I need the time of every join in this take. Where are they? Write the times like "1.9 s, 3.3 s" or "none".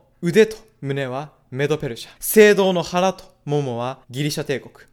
2.2 s, 4.0 s